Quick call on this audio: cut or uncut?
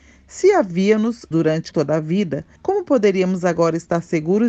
cut